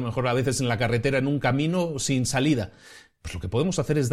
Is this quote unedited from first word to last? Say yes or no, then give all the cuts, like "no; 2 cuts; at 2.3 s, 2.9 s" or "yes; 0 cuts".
yes; 0 cuts